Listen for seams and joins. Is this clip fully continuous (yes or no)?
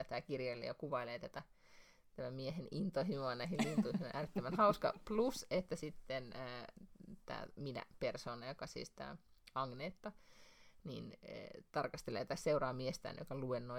yes